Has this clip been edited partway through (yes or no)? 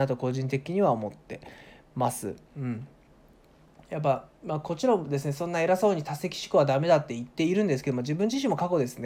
no